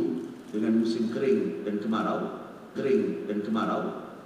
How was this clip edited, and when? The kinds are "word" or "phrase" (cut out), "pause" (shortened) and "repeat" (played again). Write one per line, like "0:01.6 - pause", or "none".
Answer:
0:02.8 - repeat